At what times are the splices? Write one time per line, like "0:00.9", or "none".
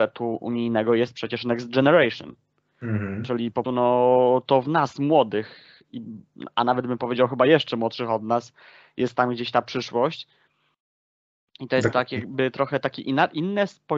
0:03.6